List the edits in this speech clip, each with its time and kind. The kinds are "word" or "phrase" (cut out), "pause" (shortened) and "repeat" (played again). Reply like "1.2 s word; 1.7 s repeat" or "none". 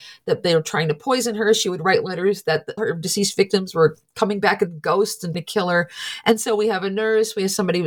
2.8 s word; 5.3 s word

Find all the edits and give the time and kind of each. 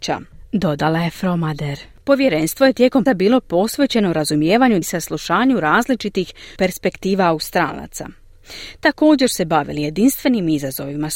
3.1 s word; 4.8 s word; 6.6 s word; 9.3 s word

